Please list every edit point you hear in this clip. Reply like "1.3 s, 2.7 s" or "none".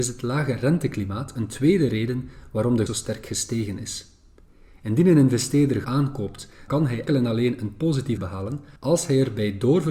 2.9 s, 5.8 s, 6.7 s, 7.1 s, 8.2 s, 8.8 s

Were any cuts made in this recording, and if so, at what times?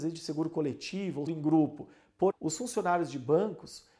1.3 s, 2.3 s

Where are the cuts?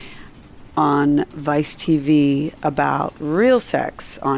none

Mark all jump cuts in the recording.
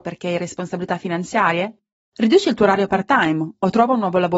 2.0 s

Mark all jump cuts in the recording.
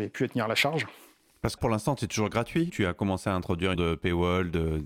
1.6 s, 2.7 s, 3.7 s

